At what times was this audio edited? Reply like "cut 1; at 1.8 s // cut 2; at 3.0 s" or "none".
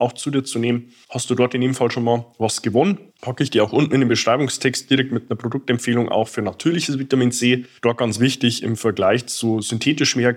cut 1; at 1.0 s // cut 2; at 3.1 s // cut 3; at 7.8 s